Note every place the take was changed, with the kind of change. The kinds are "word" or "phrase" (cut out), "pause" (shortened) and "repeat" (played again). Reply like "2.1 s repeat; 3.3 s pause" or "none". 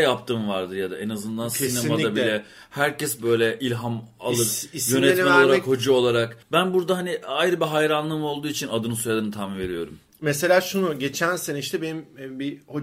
6.4 s pause